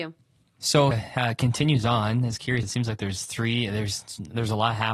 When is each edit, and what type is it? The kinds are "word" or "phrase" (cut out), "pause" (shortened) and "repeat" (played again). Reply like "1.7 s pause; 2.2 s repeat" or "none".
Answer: 0.9 s word; 2.6 s word